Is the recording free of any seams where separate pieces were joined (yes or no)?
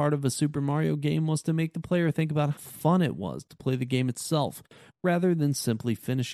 no